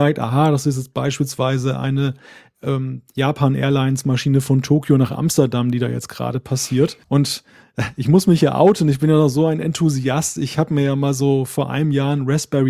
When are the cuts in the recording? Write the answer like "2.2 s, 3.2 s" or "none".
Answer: 7.0 s

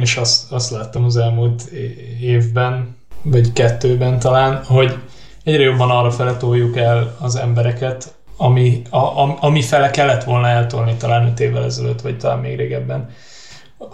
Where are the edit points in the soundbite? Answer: none

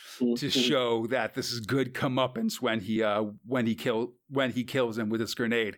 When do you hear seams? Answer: none

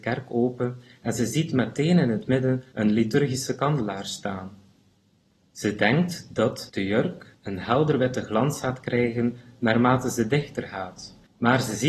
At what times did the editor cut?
2.7 s

